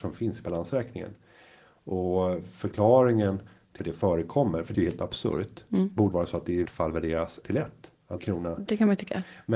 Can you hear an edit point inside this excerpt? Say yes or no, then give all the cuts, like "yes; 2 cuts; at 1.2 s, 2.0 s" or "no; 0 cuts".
yes; 6 cuts; at 3.8 s, 4.7 s, 6.1 s, 6.7 s, 7.4 s, 8.2 s